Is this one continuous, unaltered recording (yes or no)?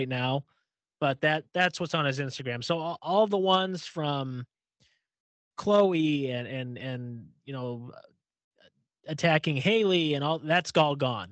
yes